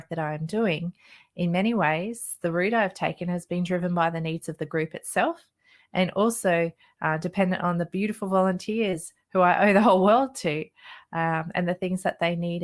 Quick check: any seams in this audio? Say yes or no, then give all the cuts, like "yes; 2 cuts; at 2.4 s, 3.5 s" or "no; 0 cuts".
no; 0 cuts